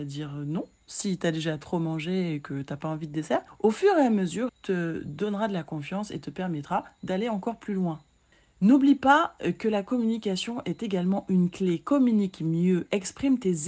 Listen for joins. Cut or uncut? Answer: cut